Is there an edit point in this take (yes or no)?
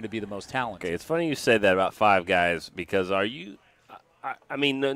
no